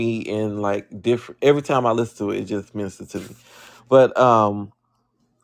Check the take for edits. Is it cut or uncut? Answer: uncut